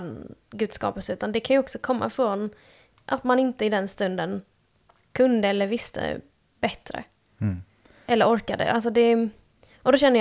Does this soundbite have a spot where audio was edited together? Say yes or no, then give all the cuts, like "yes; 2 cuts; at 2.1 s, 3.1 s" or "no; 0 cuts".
no; 0 cuts